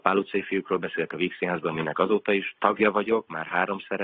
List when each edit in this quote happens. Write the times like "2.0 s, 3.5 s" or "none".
none